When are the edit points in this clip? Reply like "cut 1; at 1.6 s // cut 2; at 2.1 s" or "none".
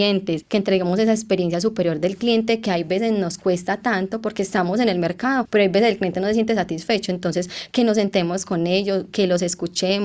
none